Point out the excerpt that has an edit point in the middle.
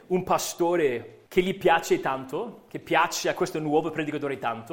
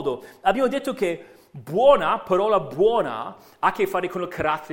first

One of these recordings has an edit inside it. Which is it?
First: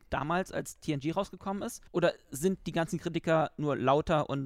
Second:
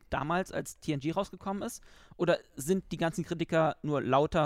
first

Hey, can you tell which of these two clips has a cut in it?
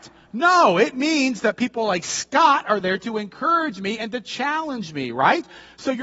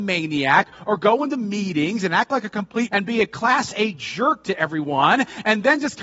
second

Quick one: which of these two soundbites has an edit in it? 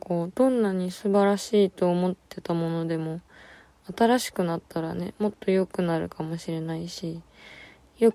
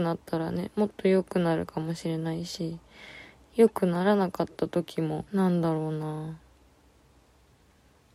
second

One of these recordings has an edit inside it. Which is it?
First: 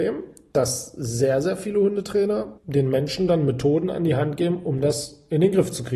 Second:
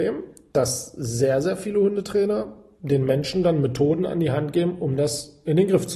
first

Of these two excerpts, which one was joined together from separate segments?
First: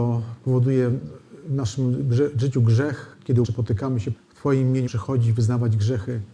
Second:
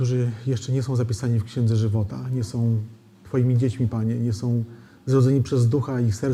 first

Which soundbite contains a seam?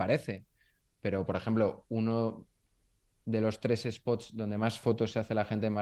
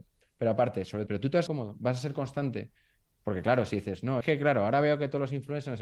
second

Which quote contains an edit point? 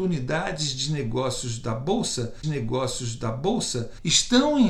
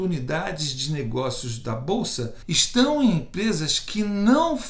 first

